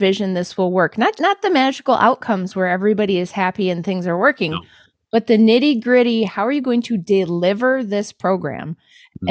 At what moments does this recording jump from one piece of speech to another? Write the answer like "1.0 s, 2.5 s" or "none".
1.2 s